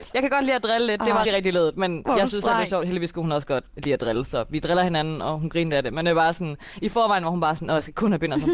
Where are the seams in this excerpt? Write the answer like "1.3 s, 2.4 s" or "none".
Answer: 1.3 s